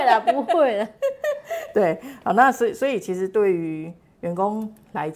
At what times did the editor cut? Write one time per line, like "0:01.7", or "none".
none